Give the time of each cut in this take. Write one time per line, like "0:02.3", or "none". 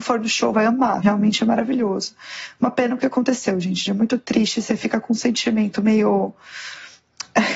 0:01.0
0:03.9

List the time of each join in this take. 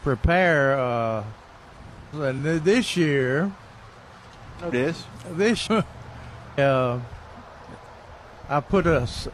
0:02.1
0:04.7
0:05.7
0:06.6

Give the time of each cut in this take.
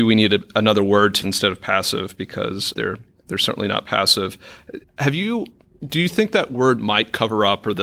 0:01.2
0:02.7
0:04.8

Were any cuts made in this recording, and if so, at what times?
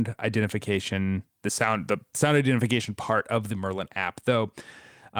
0:01.3

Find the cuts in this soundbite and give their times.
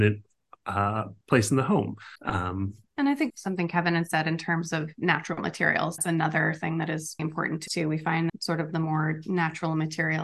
0:01.2
0:02.2
0:03.3
0:06.0
0:07.2
0:07.7
0:08.3

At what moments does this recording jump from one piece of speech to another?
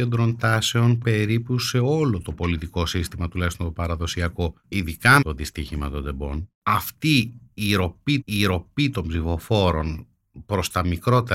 0:01.0
0:05.2
0:06.5
0:08.2

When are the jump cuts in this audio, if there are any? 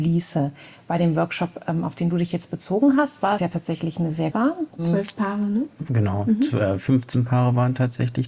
0:03.4
0:04.3
0:04.7

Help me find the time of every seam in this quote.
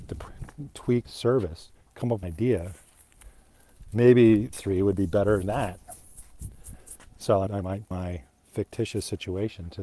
0:01.1
0:01.8
0:02.2
0:04.5
0:05.4
0:07.5
0:07.9

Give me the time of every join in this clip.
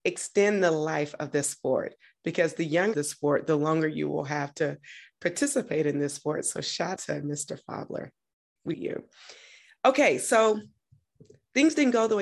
0:02.9
0:07.0
0:08.7

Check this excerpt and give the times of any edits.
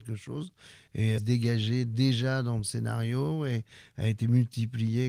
0:01.2

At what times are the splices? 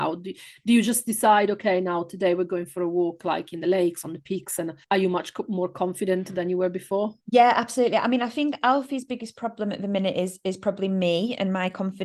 0:04.8
0:07.2

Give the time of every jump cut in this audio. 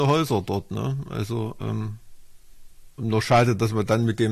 0:03.0

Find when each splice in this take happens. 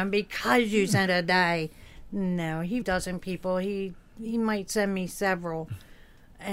0:01.1
0:02.8

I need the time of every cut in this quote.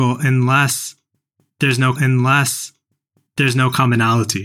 0:01.9

